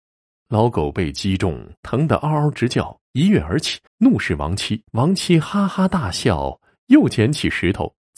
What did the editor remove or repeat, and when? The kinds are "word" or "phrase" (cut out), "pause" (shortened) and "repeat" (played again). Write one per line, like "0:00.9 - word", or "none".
0:01.8 - pause
0:03.0 - pause
0:03.9 - pause
0:04.8 - pause